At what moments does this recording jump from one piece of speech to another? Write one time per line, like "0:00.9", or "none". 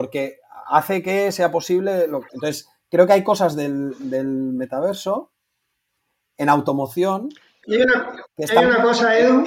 none

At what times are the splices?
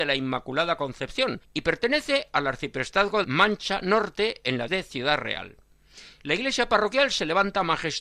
0:01.4
0:03.2
0:04.7

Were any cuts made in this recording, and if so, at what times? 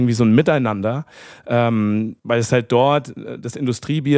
0:02.2

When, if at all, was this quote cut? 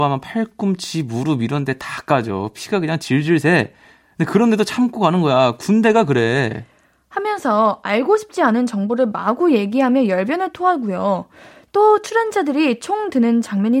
none

